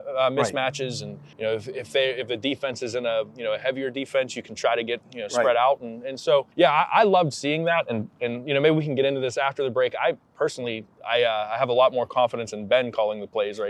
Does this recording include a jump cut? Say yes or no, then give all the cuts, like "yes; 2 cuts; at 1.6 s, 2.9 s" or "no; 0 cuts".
yes; 3 cuts; at 1.3 s, 6.5 s, 10.9 s